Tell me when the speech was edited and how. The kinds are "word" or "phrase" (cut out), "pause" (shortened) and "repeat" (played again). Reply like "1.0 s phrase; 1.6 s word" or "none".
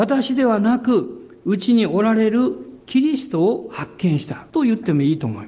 4.5 s pause